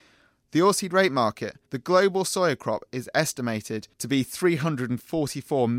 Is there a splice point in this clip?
yes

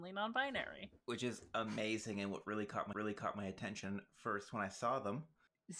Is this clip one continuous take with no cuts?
no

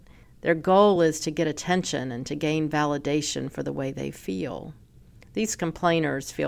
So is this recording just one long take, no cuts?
yes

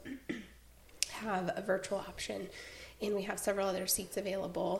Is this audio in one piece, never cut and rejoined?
yes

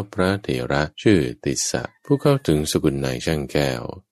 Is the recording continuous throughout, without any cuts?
no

